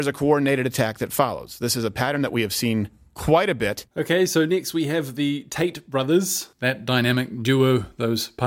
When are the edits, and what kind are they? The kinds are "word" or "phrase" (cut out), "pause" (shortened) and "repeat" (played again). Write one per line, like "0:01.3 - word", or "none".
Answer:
0:03.9 - pause
0:06.5 - pause